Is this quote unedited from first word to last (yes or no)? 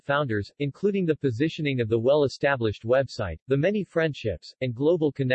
yes